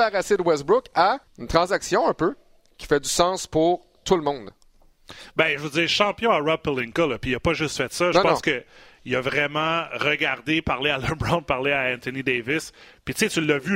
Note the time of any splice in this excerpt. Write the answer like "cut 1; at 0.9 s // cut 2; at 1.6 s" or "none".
cut 1; at 1.2 s